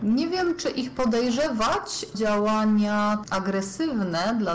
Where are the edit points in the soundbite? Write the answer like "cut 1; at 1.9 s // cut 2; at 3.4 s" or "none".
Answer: cut 1; at 2.1 s // cut 2; at 3.2 s